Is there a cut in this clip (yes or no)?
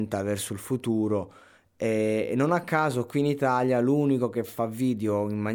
no